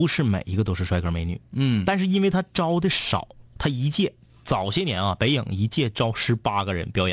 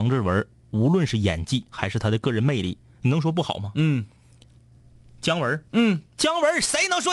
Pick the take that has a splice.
second; 1 cut; at 5.7 s

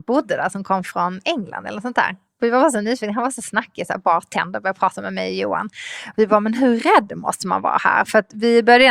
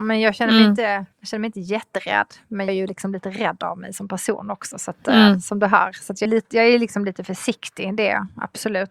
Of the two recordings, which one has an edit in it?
second; 3 cuts; at 1.1 s, 2.7 s, 6.3 s

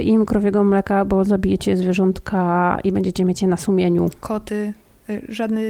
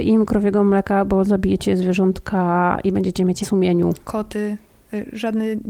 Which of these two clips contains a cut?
second; 1 cut; at 3.4 s

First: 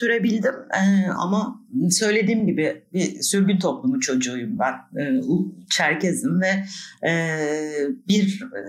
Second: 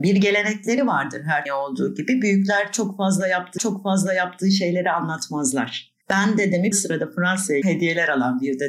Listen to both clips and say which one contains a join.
second; 5 cuts; at 1.5 s, 3.6 s, 6.0 s, 6.7 s, 7.6 s

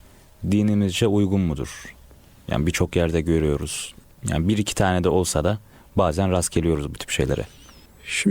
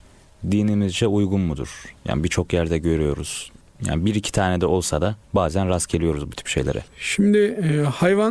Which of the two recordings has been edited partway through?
second; 3 cuts; at 2.0 s, 5.2 s, 6.9 s

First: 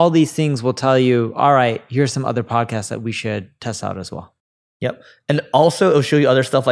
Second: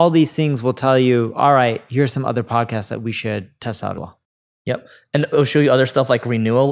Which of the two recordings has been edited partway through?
second; 2 cuts; at 3.9 s, 5.3 s

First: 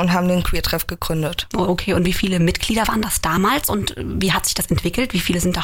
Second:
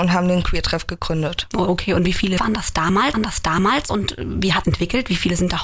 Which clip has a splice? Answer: second; 3 cuts; at 2.4 s, 3.1 s, 4.6 s

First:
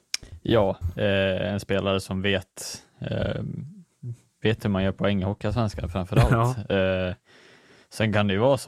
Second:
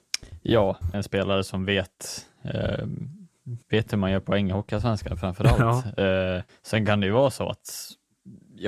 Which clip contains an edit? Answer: second; 3 cuts; at 0.9 s, 3.6 s, 6.5 s

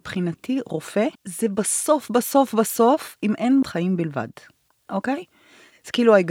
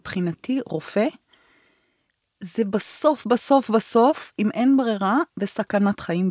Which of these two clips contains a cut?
first; 2 cuts; at 1.1 s, 3.6 s

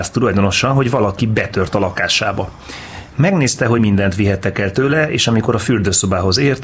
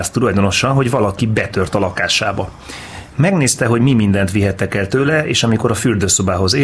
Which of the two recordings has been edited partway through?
first; 1 cut; at 3.8 s

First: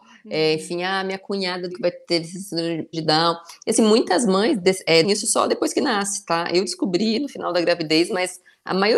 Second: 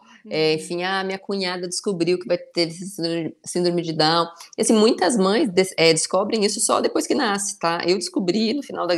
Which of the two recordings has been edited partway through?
first; 3 cuts; at 1.7 s, 2.9 s, 5.0 s

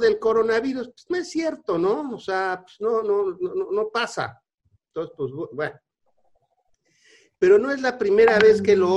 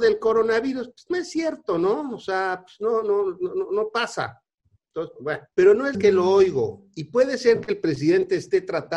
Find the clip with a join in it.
second; 3 cuts; at 5.2 s, 5.5 s, 5.9 s

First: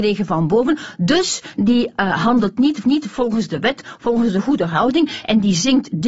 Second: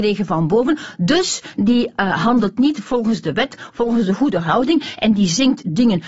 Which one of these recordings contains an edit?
first; 1 cut; at 2.8 s

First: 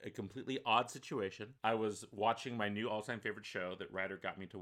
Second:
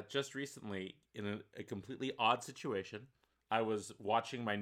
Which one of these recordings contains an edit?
first; 1 cut; at 1.6 s

